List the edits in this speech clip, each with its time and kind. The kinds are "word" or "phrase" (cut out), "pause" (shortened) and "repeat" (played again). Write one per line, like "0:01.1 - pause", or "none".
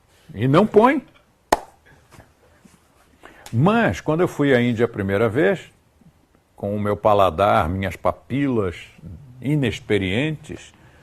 none